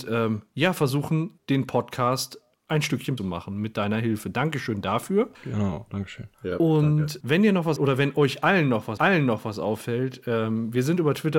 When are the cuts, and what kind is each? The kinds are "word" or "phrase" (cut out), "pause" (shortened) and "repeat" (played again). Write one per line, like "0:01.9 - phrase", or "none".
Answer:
0:01.4 - word
0:03.2 - phrase
0:05.3 - pause
0:06.3 - pause
0:07.2 - word
0:07.8 - word
0:09.0 - repeat